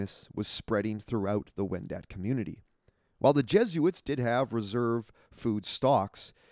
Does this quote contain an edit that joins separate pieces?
no; 0 cuts

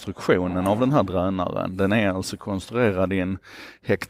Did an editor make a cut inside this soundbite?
no; 0 cuts

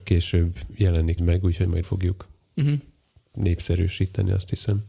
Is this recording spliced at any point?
yes; 2 cuts; at 1.2 s, 1.8 s

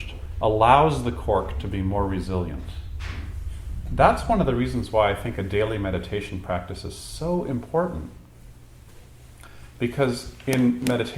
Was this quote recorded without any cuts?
yes; 0 cuts

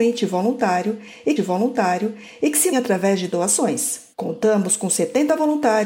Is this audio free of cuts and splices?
no; 3 cuts; at 1.4 s, 2.7 s, 4.1 s

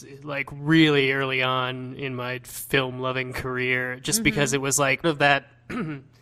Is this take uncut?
no; 1 cut; at 5.0 s

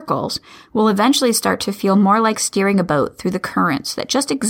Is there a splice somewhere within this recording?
no; 0 cuts

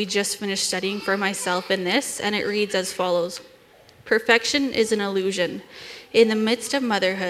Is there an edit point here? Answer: no; 0 cuts

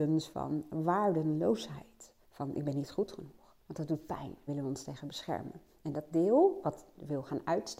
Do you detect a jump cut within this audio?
yes; 2 cuts; at 3.6 s, 4.5 s

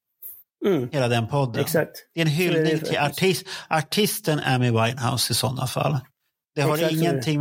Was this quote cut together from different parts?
no; 0 cuts

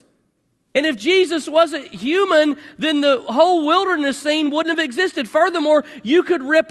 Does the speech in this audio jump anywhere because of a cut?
no; 0 cuts

